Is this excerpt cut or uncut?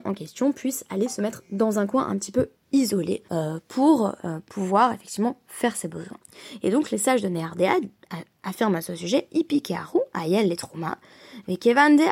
cut